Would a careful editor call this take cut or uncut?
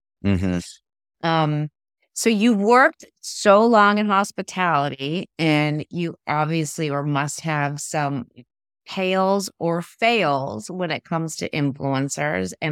uncut